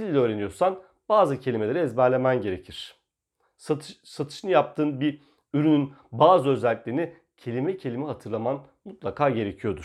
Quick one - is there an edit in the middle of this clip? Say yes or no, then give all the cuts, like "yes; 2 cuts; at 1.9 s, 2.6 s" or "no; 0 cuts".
no; 0 cuts